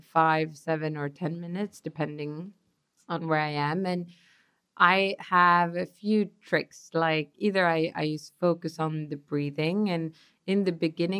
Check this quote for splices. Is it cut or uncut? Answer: uncut